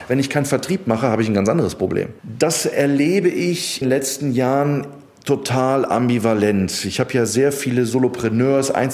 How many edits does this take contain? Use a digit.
2